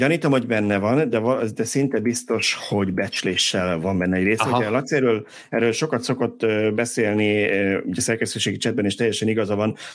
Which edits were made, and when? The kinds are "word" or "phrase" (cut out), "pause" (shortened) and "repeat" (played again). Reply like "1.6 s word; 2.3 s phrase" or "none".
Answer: none